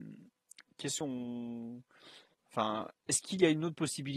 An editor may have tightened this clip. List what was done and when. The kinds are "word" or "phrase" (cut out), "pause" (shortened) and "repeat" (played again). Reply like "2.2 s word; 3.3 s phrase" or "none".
1.0 s word; 2.3 s pause